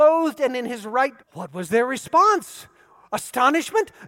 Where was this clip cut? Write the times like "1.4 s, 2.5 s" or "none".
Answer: 1.2 s